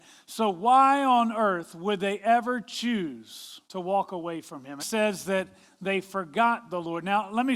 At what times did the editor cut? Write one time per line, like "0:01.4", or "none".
0:03.7
0:04.8